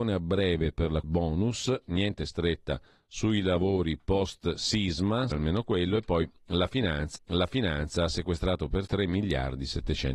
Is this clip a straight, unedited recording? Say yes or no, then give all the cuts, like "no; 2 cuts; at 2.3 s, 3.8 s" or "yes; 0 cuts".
no; 5 cuts; at 1.0 s, 2.9 s, 5.3 s, 7.2 s, 8.9 s